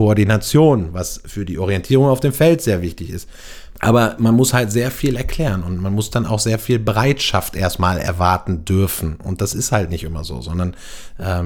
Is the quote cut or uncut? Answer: uncut